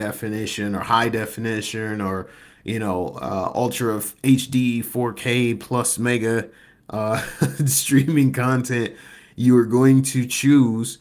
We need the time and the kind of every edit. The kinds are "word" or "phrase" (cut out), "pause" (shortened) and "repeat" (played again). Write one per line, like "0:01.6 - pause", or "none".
none